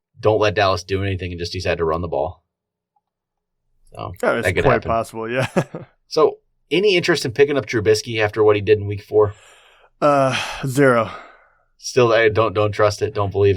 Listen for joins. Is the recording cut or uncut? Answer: uncut